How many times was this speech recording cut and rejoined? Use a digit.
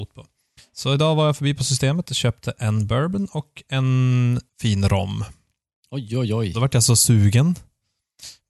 1